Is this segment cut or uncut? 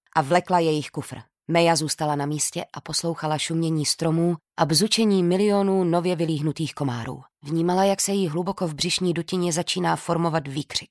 cut